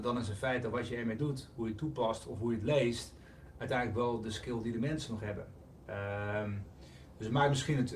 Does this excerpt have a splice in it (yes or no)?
no